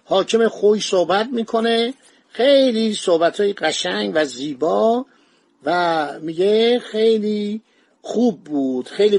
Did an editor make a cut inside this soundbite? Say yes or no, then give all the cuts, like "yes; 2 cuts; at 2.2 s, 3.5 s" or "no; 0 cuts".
no; 0 cuts